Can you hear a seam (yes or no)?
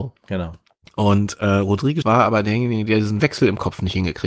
yes